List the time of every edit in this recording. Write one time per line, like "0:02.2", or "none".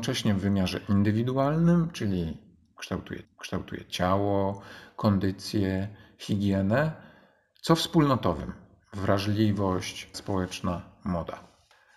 0:03.2
0:10.1

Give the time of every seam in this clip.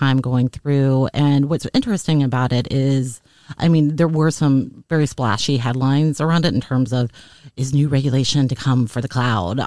none

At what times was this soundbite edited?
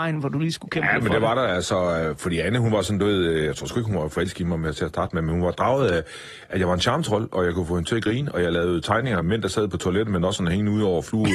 0:09.2

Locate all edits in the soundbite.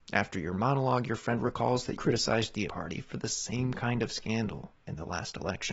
0:02.0
0:02.7

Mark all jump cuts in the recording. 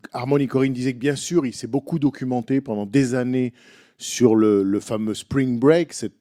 none

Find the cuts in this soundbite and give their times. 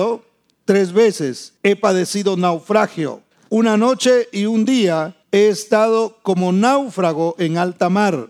0:01.6
0:03.3
0:05.2

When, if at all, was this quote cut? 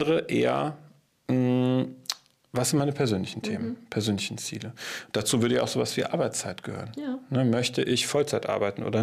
none

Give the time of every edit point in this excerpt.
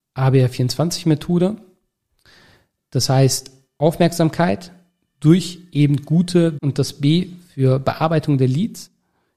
0:06.6

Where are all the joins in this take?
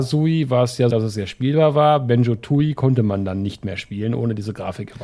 0:00.9

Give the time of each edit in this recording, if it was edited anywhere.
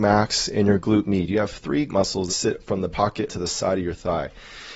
0:01.9
0:02.3
0:02.9
0:03.3

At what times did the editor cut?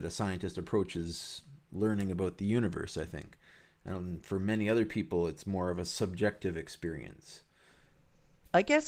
none

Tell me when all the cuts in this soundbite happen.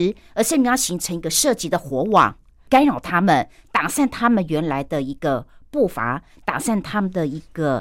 none

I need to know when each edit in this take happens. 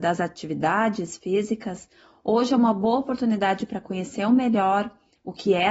none

